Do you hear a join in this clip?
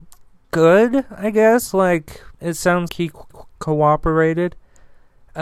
yes; 3 cuts; at 2.3 s, 2.9 s, 3.3 s

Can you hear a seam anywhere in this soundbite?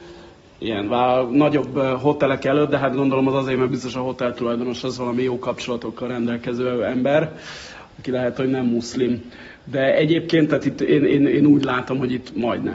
no; 0 cuts

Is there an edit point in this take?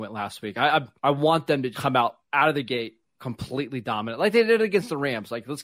yes; 2 cuts; at 1.0 s, 1.7 s

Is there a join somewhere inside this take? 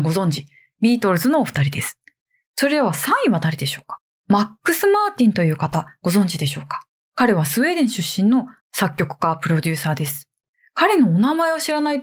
yes; 1 cut; at 8.6 s

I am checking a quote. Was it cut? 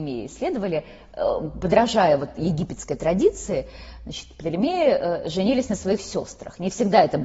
no; 0 cuts

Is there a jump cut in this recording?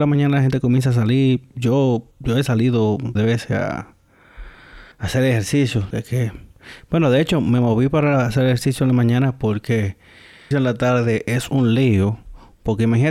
yes; 5 cuts; at 2.1 s, 3.2 s, 4.9 s, 5.9 s, 10.5 s

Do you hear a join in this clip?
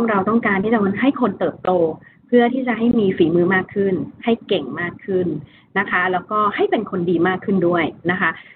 no; 0 cuts

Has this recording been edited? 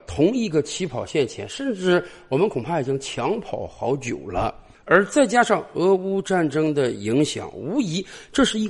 no; 0 cuts

